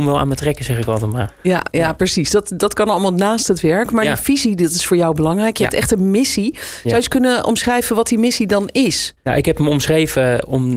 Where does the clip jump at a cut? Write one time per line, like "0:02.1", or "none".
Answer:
0:09.2